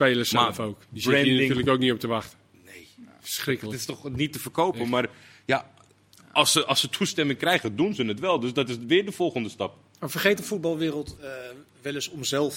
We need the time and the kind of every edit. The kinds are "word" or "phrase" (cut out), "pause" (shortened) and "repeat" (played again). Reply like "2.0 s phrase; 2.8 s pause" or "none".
none